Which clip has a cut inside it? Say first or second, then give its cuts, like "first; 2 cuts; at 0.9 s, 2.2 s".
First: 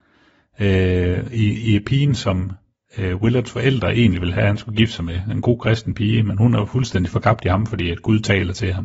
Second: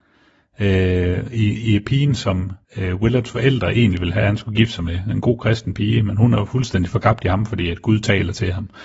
second; 1 cut; at 2.6 s